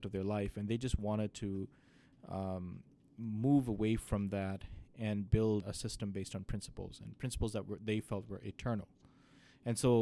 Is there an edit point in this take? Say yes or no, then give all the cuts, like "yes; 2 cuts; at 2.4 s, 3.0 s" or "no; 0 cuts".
yes; 1 cut; at 5.6 s